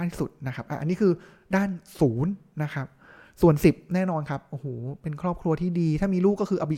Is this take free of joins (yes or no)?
yes